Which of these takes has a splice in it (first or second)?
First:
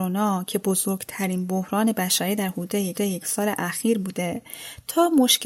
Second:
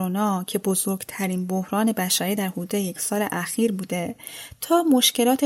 first